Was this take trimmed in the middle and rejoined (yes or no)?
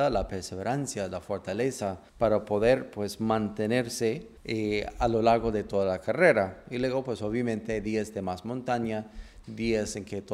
yes